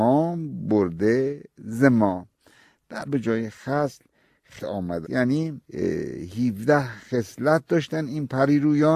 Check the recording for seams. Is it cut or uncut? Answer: cut